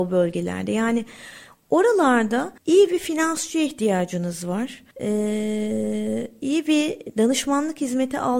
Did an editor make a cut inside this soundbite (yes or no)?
yes